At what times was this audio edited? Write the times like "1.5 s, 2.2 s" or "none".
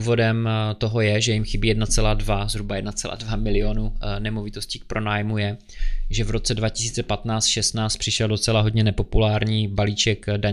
none